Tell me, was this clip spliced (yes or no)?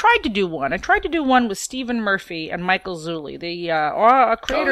no